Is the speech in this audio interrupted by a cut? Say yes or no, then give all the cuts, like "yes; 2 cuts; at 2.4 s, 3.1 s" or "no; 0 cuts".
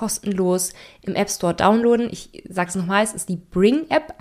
no; 0 cuts